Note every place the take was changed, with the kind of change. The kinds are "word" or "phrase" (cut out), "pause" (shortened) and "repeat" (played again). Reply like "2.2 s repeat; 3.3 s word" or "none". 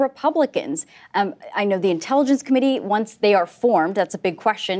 none